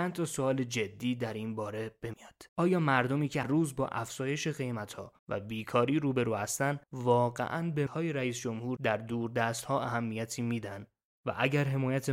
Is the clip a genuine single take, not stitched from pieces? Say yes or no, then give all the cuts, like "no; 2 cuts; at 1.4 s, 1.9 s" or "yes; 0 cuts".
no; 6 cuts; at 2.1 s, 2.5 s, 3.4 s, 5.2 s, 6.8 s, 7.9 s